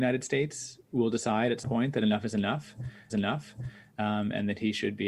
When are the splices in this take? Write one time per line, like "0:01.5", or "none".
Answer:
0:01.6
0:03.1